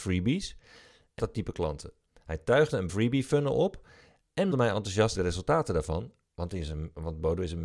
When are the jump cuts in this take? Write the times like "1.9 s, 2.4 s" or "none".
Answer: 1.2 s, 2.9 s, 4.5 s, 5.1 s